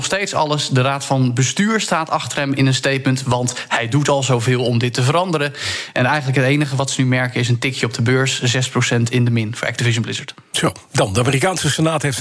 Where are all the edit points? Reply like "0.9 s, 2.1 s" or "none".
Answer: none